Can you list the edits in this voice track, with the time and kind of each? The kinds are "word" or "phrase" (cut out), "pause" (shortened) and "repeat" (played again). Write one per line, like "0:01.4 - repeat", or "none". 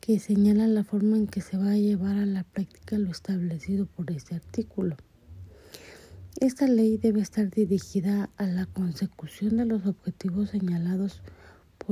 none